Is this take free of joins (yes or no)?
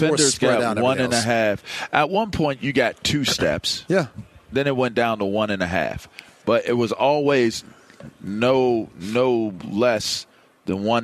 yes